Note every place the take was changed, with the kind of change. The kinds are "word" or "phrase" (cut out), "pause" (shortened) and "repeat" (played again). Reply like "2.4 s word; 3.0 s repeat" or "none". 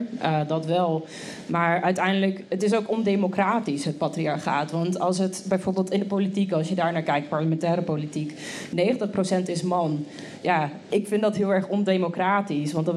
none